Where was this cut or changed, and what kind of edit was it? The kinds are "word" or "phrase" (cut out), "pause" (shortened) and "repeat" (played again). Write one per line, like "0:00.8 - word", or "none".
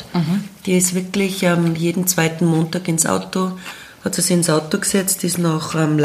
none

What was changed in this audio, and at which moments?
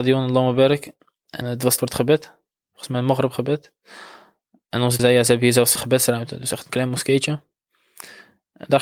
0:01.4 - word
0:01.8 - word
0:05.0 - word
0:05.8 - word
0:06.7 - word

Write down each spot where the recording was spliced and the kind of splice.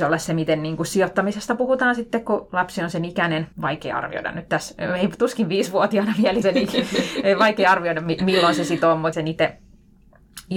0:03.5 - pause
0:06.4 - phrase
0:09.1 - phrase

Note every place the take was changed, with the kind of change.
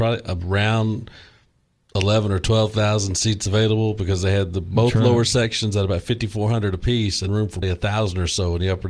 0:07.3 - word
0:07.6 - word

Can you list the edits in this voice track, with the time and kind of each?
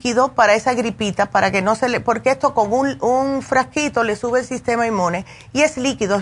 none

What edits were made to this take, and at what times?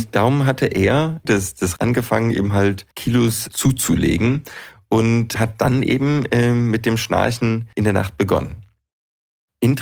0:01.3 - phrase
0:01.8 - word
0:02.9 - pause
0:07.7 - pause

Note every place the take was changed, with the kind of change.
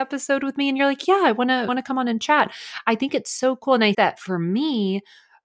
0:01.7 - word
0:03.9 - word

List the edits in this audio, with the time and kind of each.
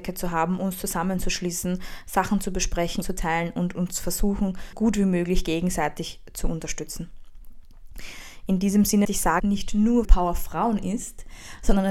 0:03.0 - word
0:04.7 - word
0:09.0 - word
0:09.4 - phrase
0:10.0 - word

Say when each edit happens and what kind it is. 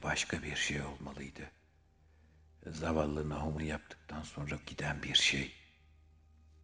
0:03.6 - word
0:04.6 - word

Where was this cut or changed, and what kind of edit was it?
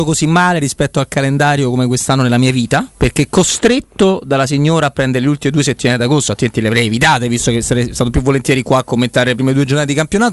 0:02.9 - pause

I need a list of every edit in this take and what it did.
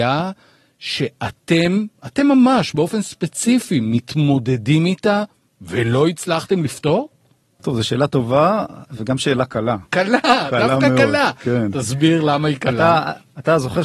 0:07.4 - pause
0:09.9 - pause

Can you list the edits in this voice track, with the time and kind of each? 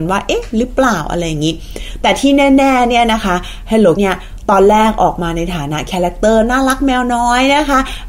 0:04.0 - word

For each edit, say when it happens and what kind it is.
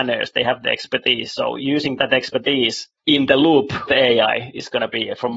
0:03.0 - pause
0:03.9 - word

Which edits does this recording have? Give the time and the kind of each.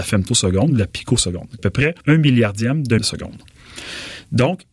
0:01.6 - phrase
0:02.0 - pause
0:03.0 - word

